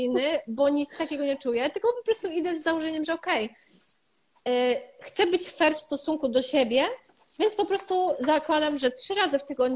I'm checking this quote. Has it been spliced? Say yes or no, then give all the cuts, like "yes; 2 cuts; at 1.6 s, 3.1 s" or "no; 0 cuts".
no; 0 cuts